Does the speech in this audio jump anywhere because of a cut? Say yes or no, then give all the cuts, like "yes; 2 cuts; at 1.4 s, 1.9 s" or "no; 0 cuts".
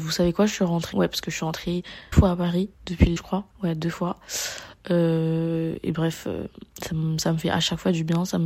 yes; 6 cuts; at 0.9 s, 2.1 s, 2.7 s, 3.2 s, 3.5 s, 6.7 s